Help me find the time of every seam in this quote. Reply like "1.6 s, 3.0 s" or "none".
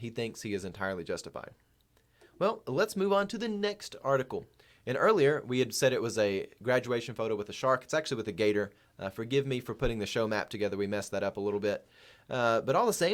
none